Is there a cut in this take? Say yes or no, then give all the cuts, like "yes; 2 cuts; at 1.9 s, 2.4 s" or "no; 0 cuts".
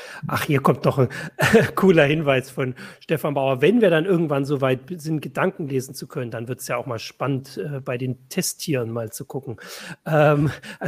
no; 0 cuts